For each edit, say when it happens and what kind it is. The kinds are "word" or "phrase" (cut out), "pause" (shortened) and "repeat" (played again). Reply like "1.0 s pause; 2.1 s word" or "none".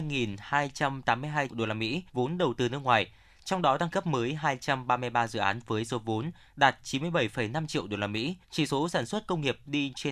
1.5 s word; 2.1 s pause; 3.9 s word; 8.4 s pause